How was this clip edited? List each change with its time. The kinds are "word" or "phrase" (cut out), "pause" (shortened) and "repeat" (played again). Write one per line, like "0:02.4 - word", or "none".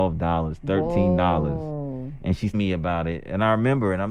0:02.5 - word